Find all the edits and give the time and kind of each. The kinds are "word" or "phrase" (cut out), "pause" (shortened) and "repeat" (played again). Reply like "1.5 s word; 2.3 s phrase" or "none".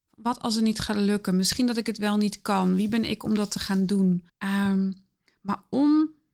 4.3 s pause